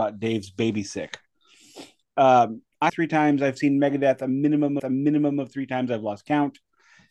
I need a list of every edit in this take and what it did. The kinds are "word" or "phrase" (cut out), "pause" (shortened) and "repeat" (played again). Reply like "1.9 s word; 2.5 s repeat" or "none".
2.9 s phrase; 4.8 s repeat

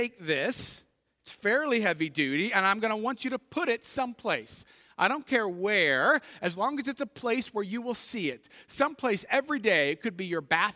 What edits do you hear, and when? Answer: none

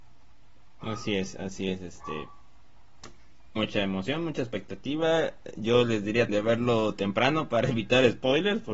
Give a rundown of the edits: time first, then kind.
3.6 s word; 6.3 s word

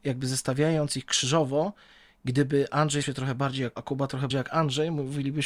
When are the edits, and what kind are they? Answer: 3.0 s word; 3.8 s word; 4.3 s word

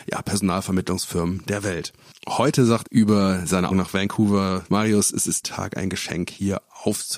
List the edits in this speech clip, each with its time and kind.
2.8 s word; 3.7 s word; 4.7 s word; 5.4 s word

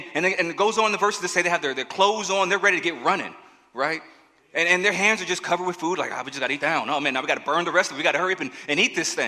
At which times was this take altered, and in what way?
6.6 s word

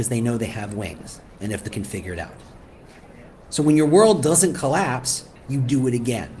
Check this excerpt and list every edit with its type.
1.7 s phrase; 5.4 s pause

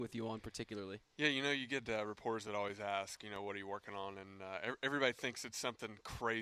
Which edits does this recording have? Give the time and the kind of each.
none

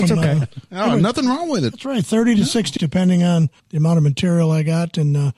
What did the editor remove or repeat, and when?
2.8 s word; 3.6 s pause

